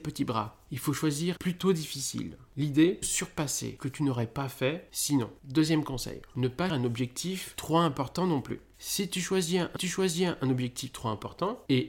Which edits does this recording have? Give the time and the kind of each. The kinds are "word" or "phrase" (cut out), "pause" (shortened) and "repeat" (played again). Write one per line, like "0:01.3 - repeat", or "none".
0:01.4 - phrase
0:03.0 - phrase
0:03.8 - phrase
0:06.7 - word
0:09.8 - repeat